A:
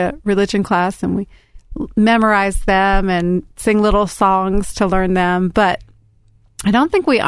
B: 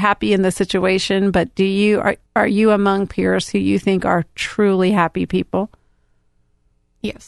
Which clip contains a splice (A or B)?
B